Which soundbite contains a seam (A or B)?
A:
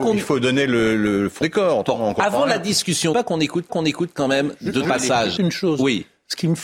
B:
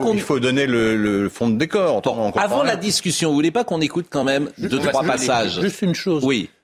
A